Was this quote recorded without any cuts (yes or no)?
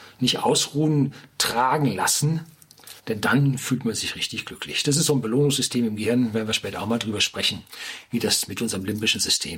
no